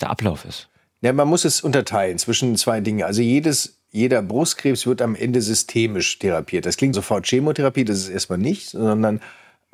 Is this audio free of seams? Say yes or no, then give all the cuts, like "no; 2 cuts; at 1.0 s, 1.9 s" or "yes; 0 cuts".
no; 1 cut; at 6.9 s